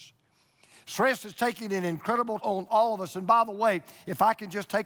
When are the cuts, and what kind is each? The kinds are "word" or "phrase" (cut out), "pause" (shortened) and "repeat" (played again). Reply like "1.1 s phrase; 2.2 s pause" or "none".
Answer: 2.4 s word